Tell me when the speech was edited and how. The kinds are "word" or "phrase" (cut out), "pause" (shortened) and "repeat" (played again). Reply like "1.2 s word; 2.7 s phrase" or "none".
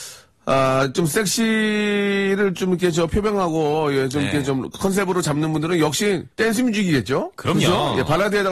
6.3 s pause